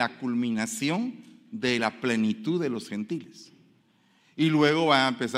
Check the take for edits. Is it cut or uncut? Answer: uncut